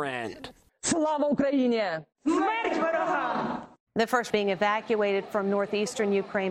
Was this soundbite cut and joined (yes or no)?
yes